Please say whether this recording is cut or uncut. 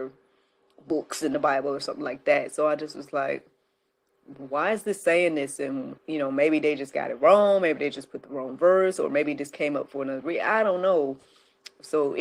cut